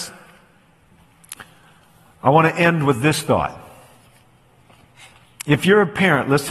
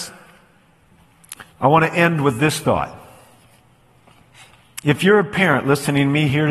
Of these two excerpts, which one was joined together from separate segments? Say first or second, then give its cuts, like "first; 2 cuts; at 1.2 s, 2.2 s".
second; 1 cut; at 1.5 s